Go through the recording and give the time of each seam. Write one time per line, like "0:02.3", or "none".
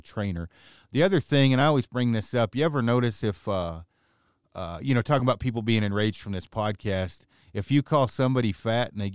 none